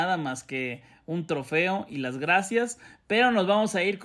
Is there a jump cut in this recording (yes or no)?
no